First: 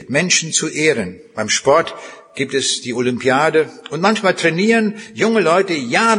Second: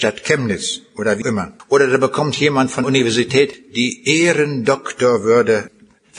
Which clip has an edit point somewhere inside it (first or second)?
second